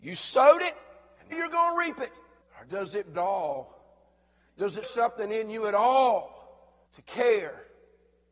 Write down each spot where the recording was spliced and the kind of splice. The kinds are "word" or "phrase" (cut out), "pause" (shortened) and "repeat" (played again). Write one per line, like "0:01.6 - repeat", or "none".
0:01.3 - word
0:02.4 - pause
0:03.1 - phrase
0:04.8 - word
0:06.9 - pause